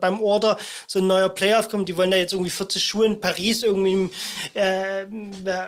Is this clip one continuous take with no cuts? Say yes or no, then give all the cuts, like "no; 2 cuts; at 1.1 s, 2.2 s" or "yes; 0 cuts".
yes; 0 cuts